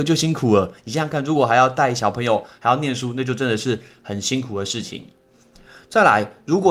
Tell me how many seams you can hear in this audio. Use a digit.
0